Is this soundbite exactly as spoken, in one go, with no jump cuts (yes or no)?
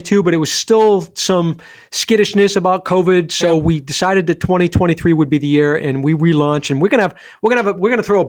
yes